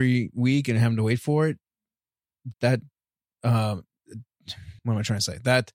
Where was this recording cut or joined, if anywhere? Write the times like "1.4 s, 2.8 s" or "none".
2.5 s, 4.8 s